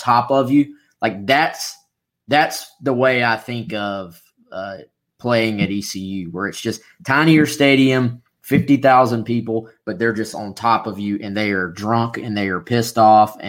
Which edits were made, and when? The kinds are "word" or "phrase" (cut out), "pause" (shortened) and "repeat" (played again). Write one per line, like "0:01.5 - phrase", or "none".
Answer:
none